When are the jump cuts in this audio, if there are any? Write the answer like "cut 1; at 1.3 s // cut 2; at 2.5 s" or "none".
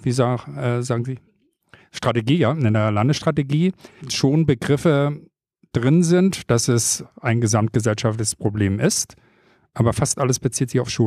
cut 1; at 4.0 s